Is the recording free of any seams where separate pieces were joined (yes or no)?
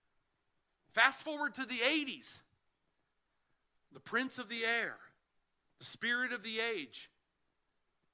yes